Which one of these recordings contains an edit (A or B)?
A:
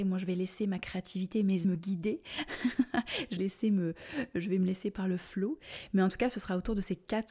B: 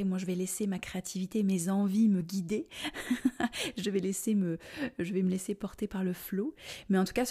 A